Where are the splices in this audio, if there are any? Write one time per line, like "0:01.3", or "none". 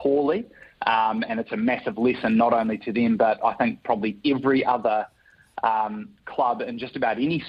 none